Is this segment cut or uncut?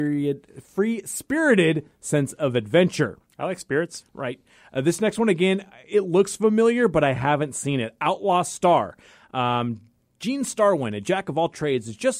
uncut